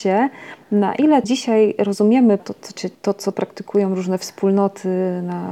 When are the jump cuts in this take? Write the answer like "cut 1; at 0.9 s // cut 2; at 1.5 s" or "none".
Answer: cut 1; at 1.2 s // cut 2; at 2.4 s // cut 3; at 2.9 s // cut 4; at 3.3 s